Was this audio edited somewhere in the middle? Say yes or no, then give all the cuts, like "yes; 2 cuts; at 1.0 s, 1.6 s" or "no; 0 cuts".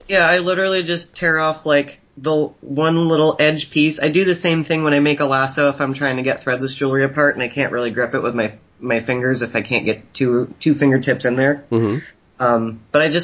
no; 0 cuts